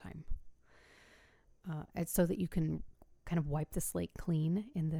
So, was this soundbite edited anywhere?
no; 0 cuts

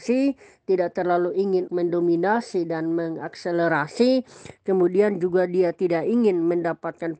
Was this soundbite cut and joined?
yes; 1 cut; at 1.7 s

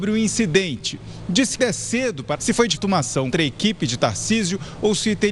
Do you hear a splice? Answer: yes; 4 cuts; at 1.6 s, 2.4 s, 2.8 s, 3.3 s

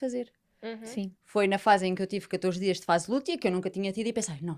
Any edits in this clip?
yes; 1 cut; at 1.2 s

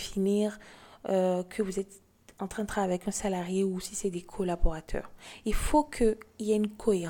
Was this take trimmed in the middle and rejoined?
no; 0 cuts

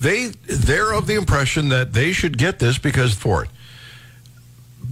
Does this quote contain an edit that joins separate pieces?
yes; 1 cut; at 3.2 s

